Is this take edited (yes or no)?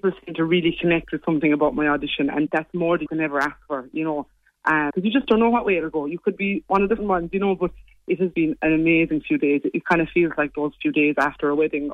yes